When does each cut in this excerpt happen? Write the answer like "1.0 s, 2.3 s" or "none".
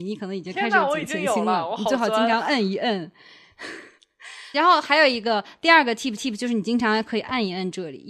4.5 s, 6.2 s